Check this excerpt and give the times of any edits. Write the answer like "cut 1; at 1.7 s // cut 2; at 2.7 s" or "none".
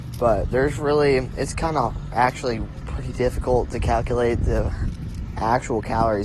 none